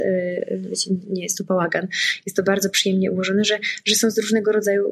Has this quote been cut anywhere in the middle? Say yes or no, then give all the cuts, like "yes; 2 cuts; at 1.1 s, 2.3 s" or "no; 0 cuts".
yes; 1 cut; at 1.0 s